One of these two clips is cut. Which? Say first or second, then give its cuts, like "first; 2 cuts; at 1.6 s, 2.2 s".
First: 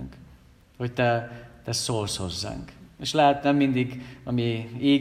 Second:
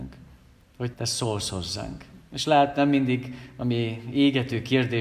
second; 1 cut; at 0.9 s